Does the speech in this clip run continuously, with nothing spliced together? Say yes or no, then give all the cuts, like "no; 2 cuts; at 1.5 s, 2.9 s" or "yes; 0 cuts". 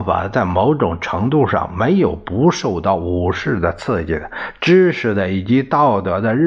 yes; 0 cuts